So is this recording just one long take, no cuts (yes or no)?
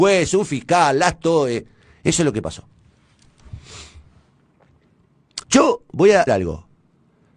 no